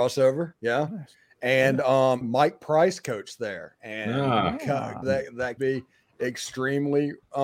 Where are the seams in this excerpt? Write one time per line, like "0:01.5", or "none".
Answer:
0:02.2
0:05.0
0:05.6